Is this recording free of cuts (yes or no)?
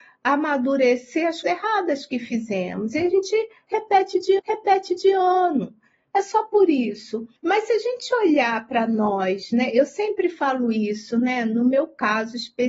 no